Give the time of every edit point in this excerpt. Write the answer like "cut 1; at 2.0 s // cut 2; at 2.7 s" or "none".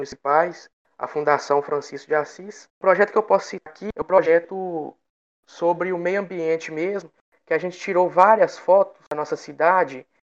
cut 1; at 2.7 s